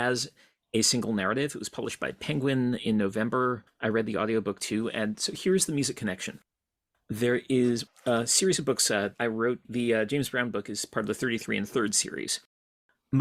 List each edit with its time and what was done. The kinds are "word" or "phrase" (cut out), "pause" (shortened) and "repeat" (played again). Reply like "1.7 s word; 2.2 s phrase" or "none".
9.1 s word